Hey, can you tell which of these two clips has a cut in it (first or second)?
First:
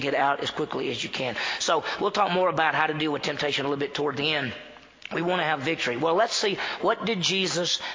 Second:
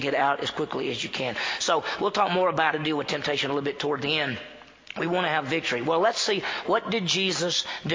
second